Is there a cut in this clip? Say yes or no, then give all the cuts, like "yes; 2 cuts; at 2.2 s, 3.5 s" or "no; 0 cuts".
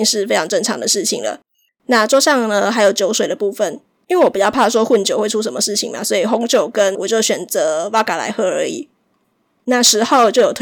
yes; 2 cuts; at 3.9 s, 6.9 s